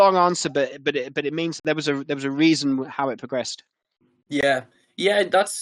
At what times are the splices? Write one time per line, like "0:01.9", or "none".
0:01.6

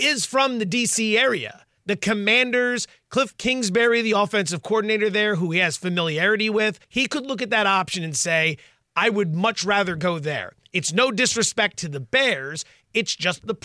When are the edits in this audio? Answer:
0:06.8

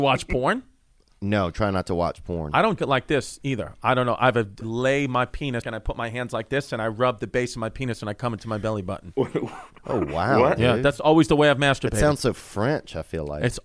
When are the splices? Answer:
0:02.8
0:04.6
0:05.6
0:09.8

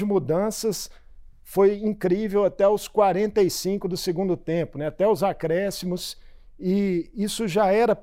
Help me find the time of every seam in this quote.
none

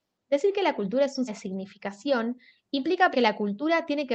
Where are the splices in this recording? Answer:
0:01.3
0:03.1

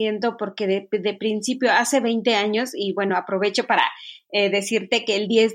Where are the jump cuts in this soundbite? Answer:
none

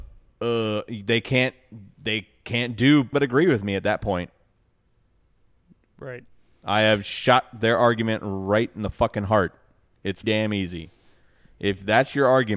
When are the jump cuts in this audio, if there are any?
0:03.1
0:10.2

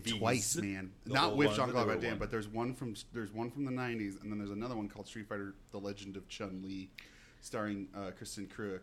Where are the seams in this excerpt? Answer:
none

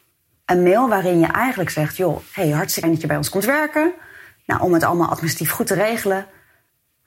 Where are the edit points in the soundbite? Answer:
0:02.8

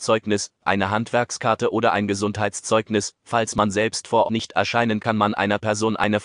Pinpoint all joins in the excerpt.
0:04.3
0:05.0

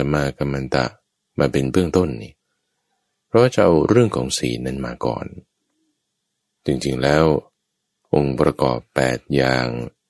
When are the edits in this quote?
none

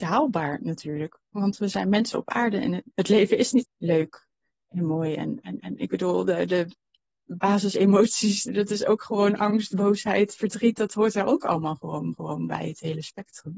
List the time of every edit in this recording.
0:01.3
0:02.9
0:03.6
0:05.6
0:08.5
0:12.1

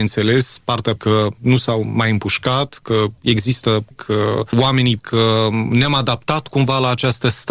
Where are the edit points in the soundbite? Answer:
0:01.0
0:03.9
0:05.0

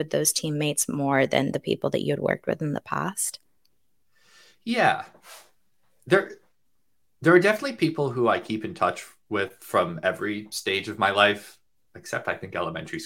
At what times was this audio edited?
none

